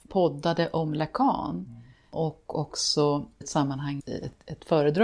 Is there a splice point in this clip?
yes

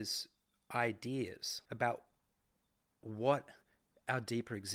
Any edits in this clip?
yes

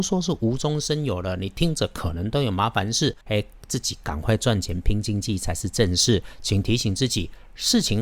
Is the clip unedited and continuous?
no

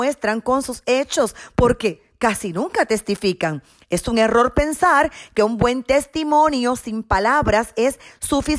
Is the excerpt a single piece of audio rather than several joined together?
yes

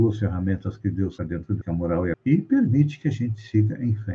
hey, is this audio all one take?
no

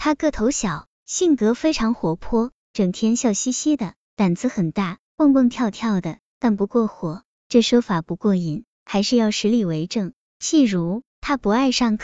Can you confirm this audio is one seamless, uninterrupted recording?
no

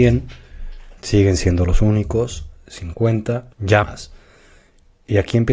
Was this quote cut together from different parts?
yes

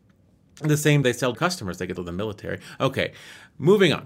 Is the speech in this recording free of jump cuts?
no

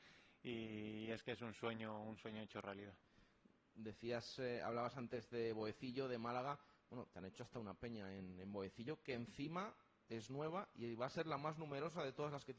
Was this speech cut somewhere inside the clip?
no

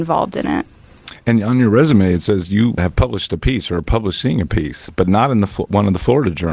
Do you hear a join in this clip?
yes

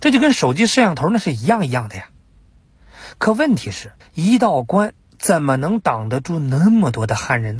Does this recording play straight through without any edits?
no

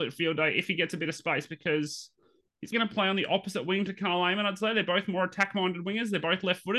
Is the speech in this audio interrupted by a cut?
yes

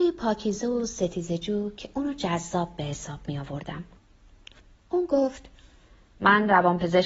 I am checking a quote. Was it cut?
no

